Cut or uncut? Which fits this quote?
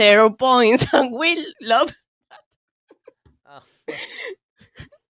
uncut